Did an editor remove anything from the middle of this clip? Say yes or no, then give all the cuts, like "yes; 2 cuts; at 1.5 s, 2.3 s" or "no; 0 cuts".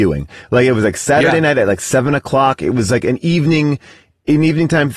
no; 0 cuts